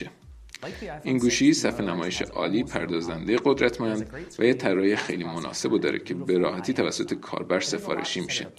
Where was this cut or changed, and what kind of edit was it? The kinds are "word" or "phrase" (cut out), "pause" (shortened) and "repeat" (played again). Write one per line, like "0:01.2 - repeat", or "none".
none